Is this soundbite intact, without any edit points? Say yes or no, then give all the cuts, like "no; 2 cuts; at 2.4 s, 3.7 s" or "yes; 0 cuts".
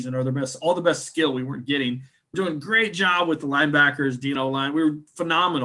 no; 2 cuts; at 2.3 s, 4.4 s